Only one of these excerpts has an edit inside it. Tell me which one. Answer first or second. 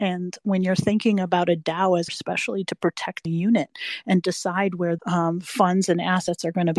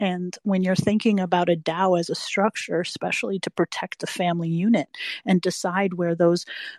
first